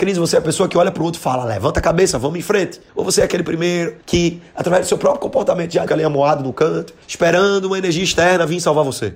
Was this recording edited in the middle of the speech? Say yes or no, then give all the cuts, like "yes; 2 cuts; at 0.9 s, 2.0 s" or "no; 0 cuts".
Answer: yes; 4 cuts; at 2.9 s, 4.0 s, 5.9 s, 7.0 s